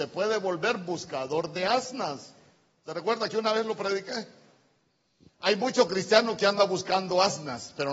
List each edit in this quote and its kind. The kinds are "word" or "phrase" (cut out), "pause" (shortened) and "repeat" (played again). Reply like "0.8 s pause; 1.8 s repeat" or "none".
none